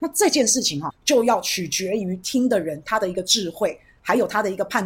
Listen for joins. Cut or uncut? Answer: cut